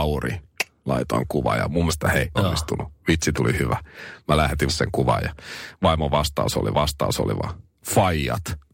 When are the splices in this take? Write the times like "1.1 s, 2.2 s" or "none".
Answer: 1.9 s, 2.3 s, 3.3 s, 4.7 s, 6.7 s